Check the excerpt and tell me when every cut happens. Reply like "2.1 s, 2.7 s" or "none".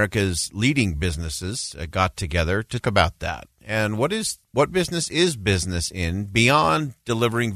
2.8 s, 4.4 s